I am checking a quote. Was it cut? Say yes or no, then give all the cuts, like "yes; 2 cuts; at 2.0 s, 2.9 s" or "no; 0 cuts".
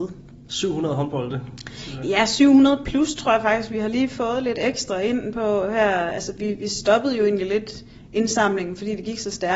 no; 0 cuts